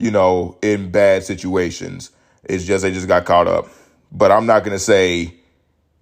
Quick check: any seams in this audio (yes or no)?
no